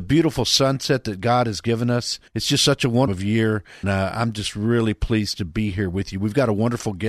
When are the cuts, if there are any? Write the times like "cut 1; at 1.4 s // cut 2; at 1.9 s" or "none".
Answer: cut 1; at 2.3 s // cut 2; at 3.1 s // cut 3; at 3.8 s

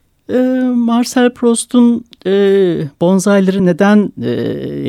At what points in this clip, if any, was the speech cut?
none

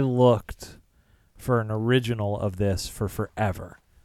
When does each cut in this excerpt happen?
none

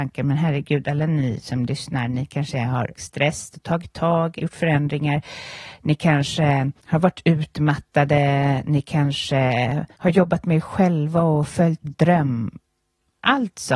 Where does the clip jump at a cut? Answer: cut 1; at 2.9 s // cut 2; at 4.4 s // cut 3; at 6.8 s // cut 4; at 9.9 s // cut 5; at 11.8 s

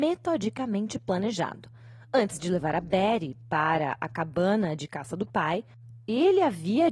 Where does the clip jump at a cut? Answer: none

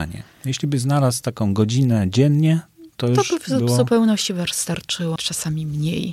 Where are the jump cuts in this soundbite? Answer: cut 1; at 5.2 s

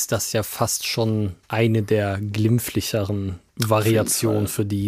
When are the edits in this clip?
cut 1; at 1.4 s // cut 2; at 3.5 s

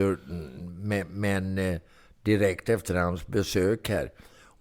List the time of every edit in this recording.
none

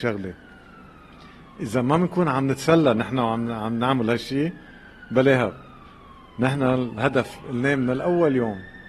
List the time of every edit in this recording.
none

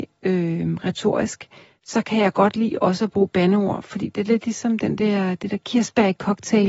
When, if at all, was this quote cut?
none

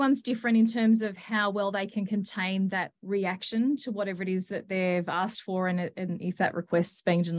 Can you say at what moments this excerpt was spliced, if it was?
none

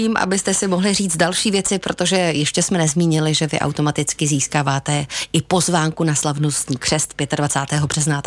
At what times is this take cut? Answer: none

